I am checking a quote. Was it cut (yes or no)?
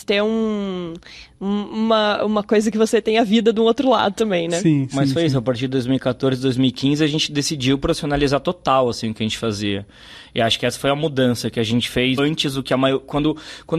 yes